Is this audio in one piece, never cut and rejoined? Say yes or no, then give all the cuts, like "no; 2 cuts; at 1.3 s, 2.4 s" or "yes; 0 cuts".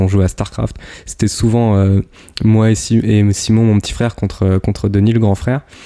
yes; 0 cuts